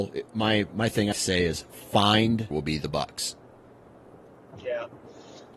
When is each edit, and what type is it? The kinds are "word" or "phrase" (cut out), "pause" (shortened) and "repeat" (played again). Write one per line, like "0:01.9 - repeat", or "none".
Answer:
0:01.1 - phrase
0:02.5 - phrase